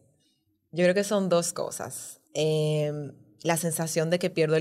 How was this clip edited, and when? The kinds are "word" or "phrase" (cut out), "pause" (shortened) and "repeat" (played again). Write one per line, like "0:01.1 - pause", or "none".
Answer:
0:02.2 - pause